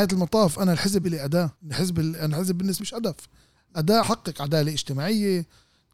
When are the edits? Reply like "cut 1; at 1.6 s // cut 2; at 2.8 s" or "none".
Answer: cut 1; at 1.0 s // cut 2; at 1.6 s // cut 3; at 2.8 s // cut 4; at 4.0 s